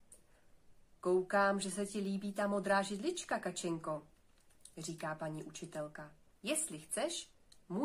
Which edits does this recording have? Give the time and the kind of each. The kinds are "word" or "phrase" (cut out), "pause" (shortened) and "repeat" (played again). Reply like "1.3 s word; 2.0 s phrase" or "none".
6.3 s pause